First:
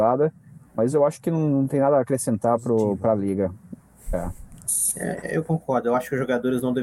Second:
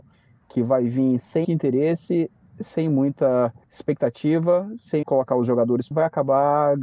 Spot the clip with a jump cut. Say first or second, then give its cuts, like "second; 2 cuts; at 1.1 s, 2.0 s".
second; 4 cuts; at 1.4 s, 3.6 s, 5.0 s, 5.9 s